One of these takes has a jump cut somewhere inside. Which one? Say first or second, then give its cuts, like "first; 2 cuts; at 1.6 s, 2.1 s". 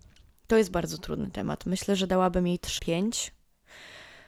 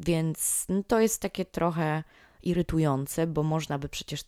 first; 1 cut; at 2.8 s